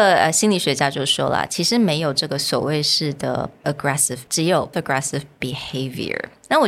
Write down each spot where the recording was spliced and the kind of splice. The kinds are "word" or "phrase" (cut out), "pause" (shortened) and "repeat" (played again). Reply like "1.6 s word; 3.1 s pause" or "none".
3.6 s word; 4.3 s word; 4.7 s word